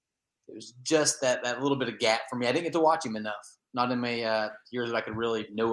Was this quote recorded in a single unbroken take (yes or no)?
yes